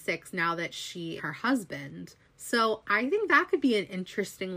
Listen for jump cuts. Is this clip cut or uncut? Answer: cut